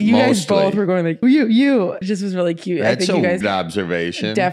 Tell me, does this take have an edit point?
yes; 3 cuts; at 1.2 s, 2.0 s, 3.4 s

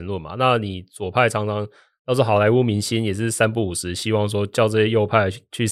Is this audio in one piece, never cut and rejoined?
yes; 0 cuts

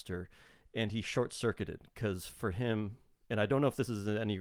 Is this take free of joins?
yes; 0 cuts

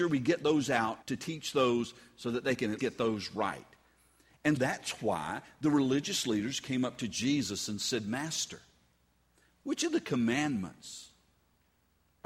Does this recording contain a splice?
yes; 3 cuts; at 1.0 s, 2.8 s, 4.6 s

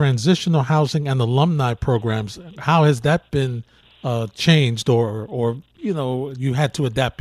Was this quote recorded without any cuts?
yes; 0 cuts

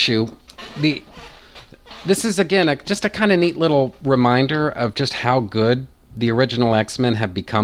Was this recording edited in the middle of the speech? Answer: no; 0 cuts

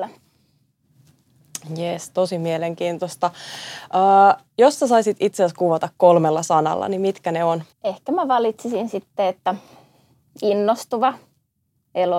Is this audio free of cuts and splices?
no; 1 cut; at 7.7 s

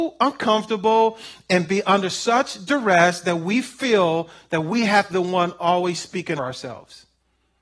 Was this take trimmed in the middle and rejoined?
yes; 2 cuts; at 5.1 s, 6.4 s

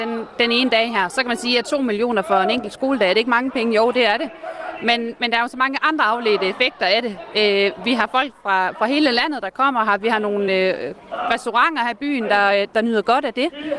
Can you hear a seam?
no; 0 cuts

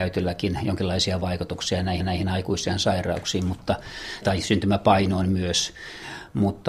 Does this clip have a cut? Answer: yes; 2 cuts; at 2.0 s, 4.2 s

